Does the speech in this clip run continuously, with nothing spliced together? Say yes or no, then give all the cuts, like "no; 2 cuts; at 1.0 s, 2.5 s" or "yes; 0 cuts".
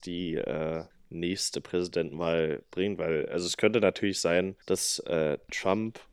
no; 2 cuts; at 0.9 s, 4.6 s